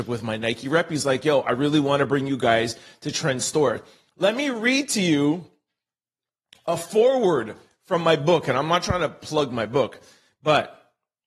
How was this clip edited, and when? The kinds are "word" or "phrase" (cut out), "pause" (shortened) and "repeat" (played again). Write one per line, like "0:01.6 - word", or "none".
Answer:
none